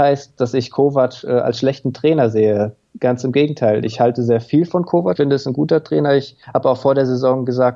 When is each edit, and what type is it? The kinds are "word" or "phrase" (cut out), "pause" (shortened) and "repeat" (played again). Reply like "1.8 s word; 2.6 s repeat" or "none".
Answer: 5.2 s word; 6.4 s pause